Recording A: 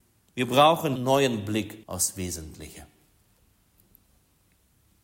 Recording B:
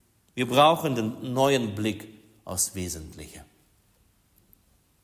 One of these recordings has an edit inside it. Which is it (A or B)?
A